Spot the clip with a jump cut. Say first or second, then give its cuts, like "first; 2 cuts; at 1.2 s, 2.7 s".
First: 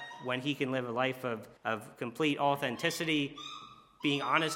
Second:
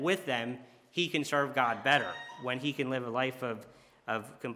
first; 1 cut; at 1.6 s